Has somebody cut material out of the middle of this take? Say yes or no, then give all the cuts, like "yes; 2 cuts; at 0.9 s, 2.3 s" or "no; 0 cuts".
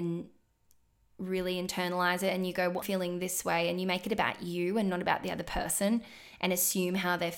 yes; 1 cut; at 2.8 s